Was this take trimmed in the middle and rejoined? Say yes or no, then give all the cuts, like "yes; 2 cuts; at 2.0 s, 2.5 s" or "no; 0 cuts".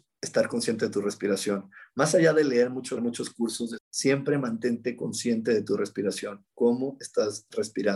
yes; 2 cuts; at 3.0 s, 3.8 s